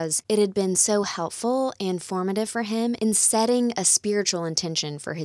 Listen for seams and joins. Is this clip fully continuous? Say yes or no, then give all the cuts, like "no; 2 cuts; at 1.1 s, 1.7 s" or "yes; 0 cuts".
yes; 0 cuts